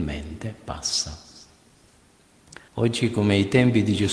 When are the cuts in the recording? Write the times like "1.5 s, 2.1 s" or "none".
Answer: 2.7 s